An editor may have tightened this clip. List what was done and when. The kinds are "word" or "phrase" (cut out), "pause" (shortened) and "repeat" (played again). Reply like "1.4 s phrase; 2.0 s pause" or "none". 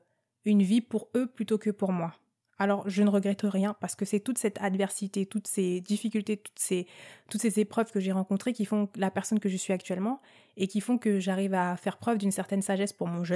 none